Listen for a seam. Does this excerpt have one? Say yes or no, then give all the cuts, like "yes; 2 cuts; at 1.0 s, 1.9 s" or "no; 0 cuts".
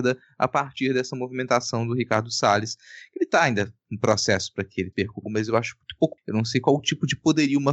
yes; 4 cuts; at 3.8 s, 4.9 s, 5.2 s, 6.2 s